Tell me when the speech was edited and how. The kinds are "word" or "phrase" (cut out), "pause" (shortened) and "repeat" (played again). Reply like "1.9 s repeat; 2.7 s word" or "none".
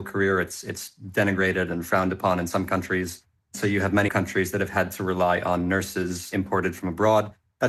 4.1 s word